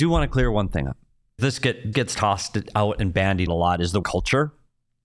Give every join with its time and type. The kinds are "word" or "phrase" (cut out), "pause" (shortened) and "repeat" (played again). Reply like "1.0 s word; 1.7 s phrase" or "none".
1.4 s word; 1.9 s word; 3.5 s word; 4.0 s word

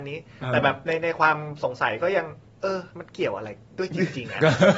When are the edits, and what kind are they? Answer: 2.4 s pause; 2.9 s pause

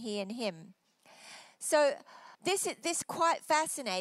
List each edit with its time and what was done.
2.3 s pause; 3.0 s phrase

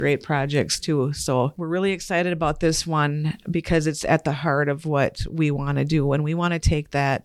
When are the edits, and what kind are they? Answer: none

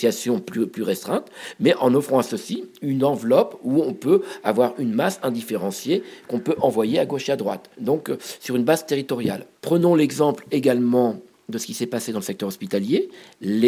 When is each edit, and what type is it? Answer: 7.7 s pause

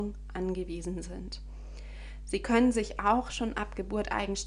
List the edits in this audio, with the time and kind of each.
none

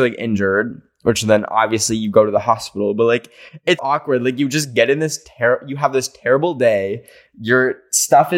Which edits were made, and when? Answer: 3.8 s word

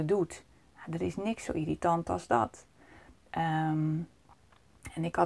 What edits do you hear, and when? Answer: none

